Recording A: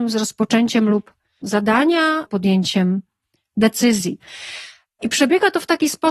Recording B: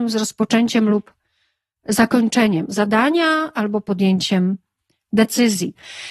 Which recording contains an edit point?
A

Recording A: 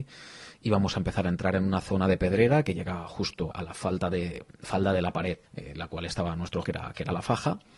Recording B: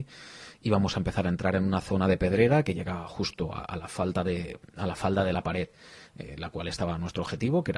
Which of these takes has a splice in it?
A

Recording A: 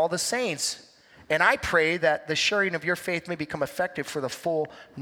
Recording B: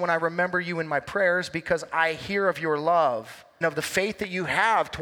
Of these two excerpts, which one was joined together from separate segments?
B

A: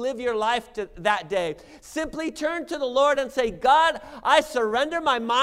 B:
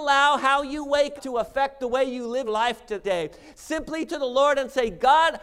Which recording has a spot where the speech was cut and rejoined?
B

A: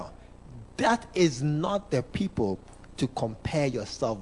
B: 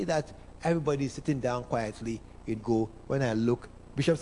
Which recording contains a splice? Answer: B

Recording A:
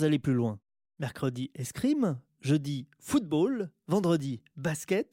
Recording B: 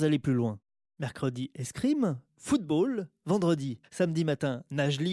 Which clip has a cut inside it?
B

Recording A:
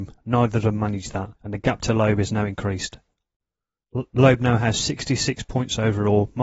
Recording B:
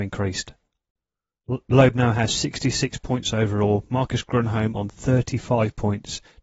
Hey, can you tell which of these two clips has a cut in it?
A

